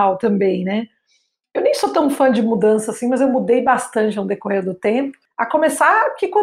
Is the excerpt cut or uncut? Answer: uncut